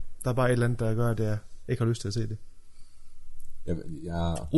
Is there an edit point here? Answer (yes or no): no